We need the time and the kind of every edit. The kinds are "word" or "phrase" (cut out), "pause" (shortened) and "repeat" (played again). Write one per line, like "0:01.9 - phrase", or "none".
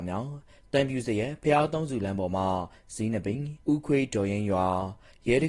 0:03.6 - pause